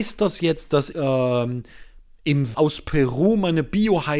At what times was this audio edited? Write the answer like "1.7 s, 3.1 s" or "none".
0.9 s, 2.5 s

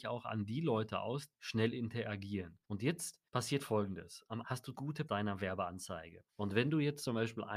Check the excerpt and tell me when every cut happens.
1.3 s, 2.6 s, 3.3 s, 4.4 s, 4.7 s, 5.1 s, 6.3 s

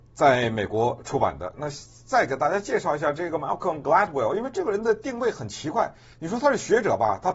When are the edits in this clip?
6.1 s

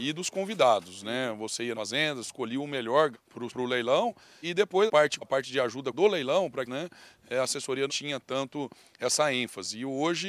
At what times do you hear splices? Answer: 1.7 s, 3.1 s, 3.5 s, 4.4 s, 4.9 s, 5.2 s, 5.9 s, 6.7 s, 7.9 s

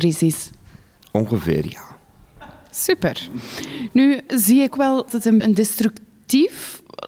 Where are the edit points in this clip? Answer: 4.3 s, 4.7 s, 5.1 s, 5.4 s

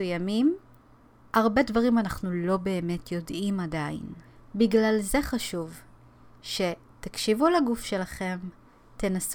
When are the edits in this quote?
none

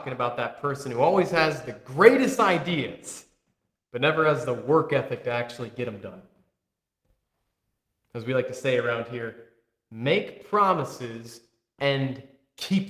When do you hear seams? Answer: none

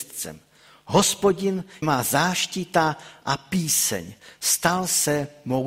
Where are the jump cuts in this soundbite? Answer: 1.8 s

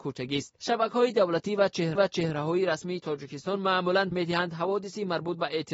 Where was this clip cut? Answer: 1.9 s, 4.1 s

